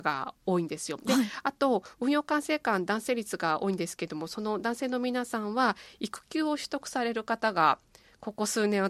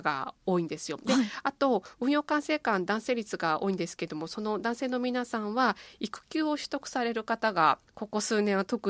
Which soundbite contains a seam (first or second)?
second